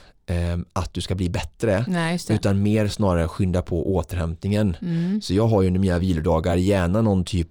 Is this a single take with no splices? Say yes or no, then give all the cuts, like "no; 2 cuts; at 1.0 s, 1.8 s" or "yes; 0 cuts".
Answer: yes; 0 cuts